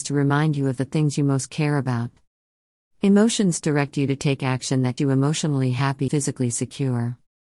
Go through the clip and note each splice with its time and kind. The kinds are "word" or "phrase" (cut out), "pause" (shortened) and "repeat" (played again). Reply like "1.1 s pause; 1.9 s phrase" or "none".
5.0 s word; 6.1 s word